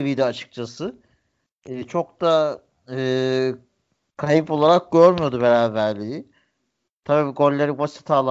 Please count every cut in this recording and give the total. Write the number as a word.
zero